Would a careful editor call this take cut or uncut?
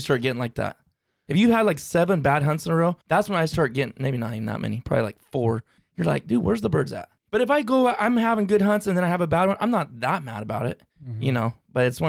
cut